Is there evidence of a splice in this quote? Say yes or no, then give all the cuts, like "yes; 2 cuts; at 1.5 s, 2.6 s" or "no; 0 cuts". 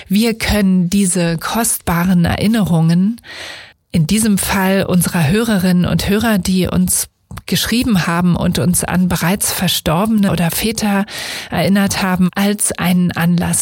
yes; 2 cuts; at 3.7 s, 10.3 s